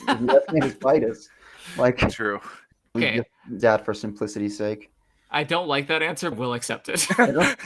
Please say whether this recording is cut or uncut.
cut